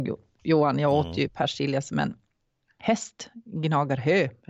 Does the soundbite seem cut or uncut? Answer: uncut